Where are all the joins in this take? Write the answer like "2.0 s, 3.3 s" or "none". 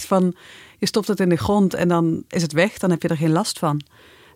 none